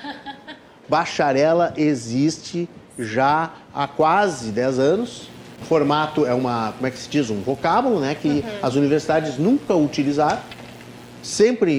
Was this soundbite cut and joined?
yes; 1 cut; at 5.6 s

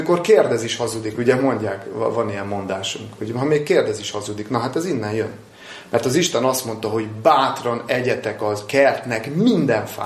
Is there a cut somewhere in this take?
no; 0 cuts

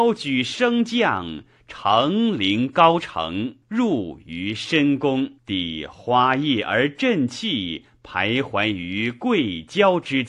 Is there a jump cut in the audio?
yes; 2 cuts; at 3.6 s, 5.4 s

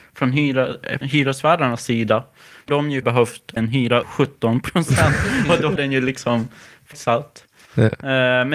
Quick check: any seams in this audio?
yes; 7 cuts; at 1.0 s, 2.7 s, 3.0 s, 3.6 s, 4.0 s, 5.8 s, 6.9 s

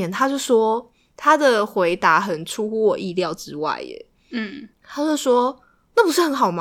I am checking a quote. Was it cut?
yes; 1 cut; at 4.7 s

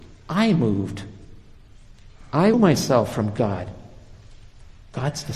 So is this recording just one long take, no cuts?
no; 1 cut; at 2.5 s

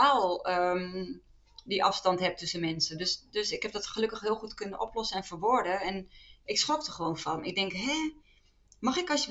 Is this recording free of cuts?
yes; 0 cuts

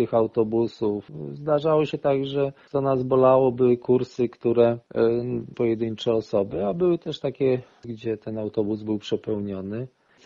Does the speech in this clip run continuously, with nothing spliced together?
no; 1 cut; at 5.5 s

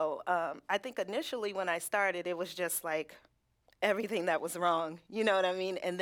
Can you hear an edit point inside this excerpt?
no; 0 cuts

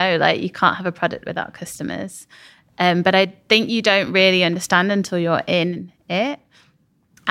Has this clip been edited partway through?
no; 0 cuts

